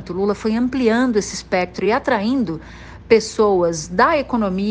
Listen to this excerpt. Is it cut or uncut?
uncut